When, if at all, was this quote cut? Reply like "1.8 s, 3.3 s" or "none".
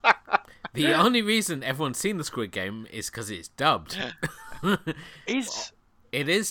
5.5 s